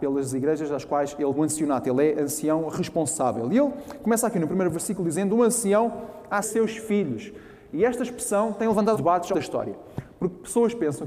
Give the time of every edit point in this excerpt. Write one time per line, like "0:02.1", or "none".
0:01.3
0:06.4
0:08.9
0:09.3